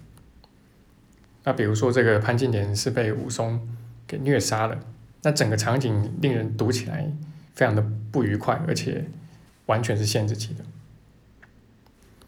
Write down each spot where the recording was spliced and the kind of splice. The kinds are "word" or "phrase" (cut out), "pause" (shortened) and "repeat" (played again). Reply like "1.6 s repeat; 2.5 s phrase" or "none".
5.1 s pause; 7.5 s pause; 9.5 s pause